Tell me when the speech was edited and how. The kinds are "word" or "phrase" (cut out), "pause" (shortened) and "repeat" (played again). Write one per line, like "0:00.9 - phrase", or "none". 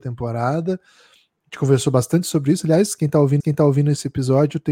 0:03.4 - repeat